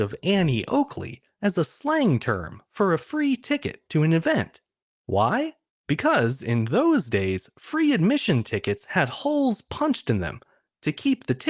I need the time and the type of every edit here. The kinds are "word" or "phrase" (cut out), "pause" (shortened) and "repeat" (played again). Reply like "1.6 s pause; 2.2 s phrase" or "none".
none